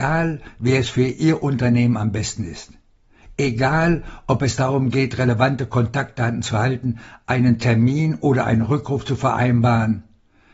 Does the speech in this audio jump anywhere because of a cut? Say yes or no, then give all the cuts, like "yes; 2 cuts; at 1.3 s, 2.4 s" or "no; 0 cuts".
no; 0 cuts